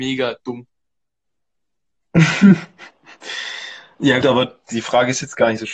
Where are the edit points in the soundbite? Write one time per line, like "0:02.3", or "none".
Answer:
0:04.2
0:04.6